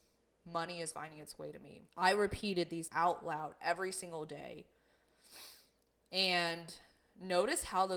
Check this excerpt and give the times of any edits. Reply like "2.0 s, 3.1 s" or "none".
0.9 s, 1.9 s, 2.9 s